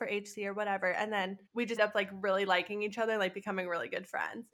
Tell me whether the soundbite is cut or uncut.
cut